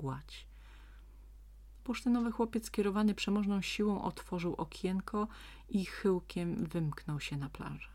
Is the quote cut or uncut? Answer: uncut